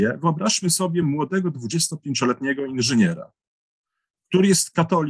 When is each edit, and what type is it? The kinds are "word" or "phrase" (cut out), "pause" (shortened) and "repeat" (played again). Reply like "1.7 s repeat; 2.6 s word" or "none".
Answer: none